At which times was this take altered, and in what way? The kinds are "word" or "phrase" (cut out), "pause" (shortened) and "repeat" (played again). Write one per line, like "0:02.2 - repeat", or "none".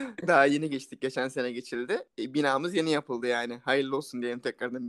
0:02.1 - pause